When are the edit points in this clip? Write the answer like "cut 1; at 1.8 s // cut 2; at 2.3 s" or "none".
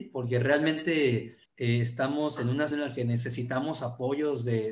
cut 1; at 1.4 s // cut 2; at 2.7 s